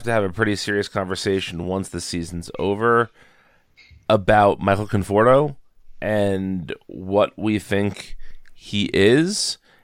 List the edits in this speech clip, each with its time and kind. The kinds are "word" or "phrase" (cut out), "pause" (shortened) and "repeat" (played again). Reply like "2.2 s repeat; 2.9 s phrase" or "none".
none